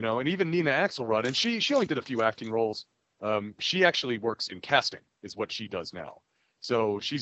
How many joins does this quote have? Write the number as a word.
zero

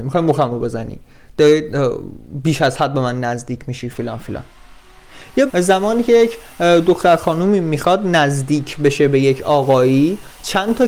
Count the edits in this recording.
two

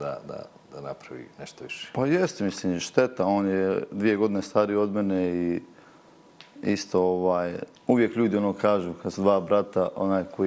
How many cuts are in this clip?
one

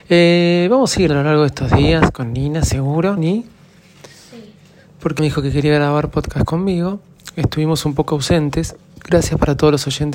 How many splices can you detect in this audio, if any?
three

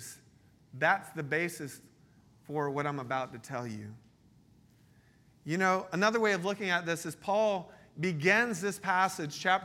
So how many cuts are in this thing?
zero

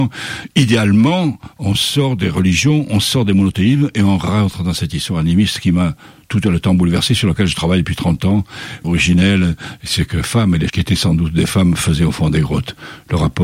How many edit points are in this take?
three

